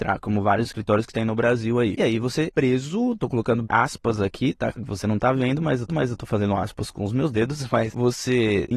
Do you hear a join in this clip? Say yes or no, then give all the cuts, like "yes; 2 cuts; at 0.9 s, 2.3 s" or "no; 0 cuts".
yes; 3 cuts; at 2.5 s, 3.6 s, 5.9 s